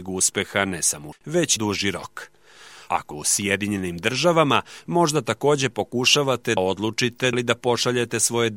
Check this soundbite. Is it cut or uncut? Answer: cut